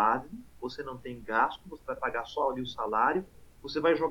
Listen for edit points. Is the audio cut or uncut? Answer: uncut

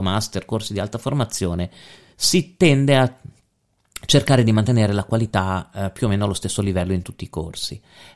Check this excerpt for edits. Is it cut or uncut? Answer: uncut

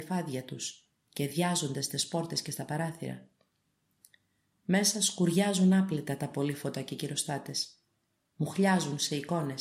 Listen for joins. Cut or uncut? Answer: uncut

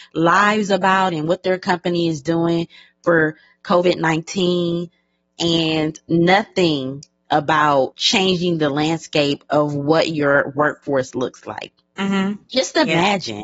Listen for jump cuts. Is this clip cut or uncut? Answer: cut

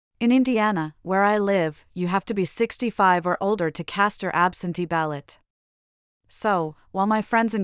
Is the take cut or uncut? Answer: uncut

